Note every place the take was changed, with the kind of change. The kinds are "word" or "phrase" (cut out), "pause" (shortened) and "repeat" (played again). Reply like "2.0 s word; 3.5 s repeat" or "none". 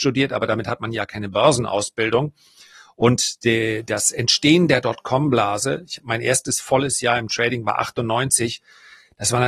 none